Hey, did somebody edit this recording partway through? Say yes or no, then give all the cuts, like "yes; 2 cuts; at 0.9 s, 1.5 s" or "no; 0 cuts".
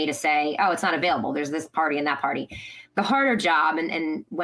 no; 0 cuts